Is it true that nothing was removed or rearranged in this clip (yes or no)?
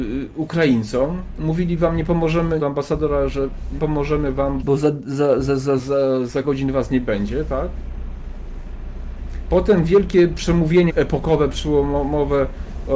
no